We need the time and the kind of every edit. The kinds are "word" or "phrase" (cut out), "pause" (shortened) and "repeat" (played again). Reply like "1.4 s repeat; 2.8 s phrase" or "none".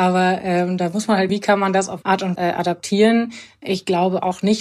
1.3 s word; 2.0 s word; 2.4 s word